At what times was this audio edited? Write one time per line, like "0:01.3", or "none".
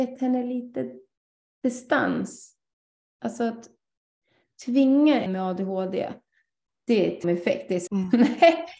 0:05.3
0:07.2
0:07.9